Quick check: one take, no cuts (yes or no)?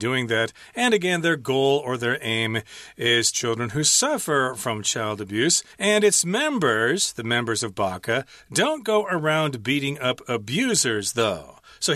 no